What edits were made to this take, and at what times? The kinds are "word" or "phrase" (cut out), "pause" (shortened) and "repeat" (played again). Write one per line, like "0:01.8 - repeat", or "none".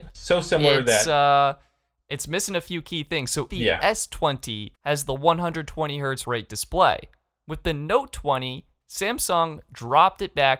0:03.5 - word
0:04.8 - pause
0:06.2 - word